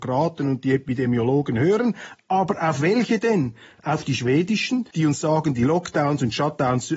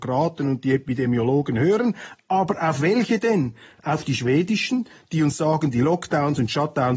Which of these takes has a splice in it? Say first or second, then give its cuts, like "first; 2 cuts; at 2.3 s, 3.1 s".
first; 1 cut; at 4.9 s